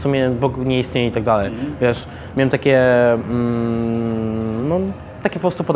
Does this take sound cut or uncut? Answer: uncut